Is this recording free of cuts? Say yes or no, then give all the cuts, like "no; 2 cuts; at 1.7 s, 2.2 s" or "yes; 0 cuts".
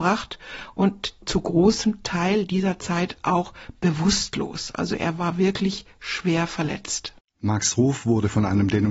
yes; 0 cuts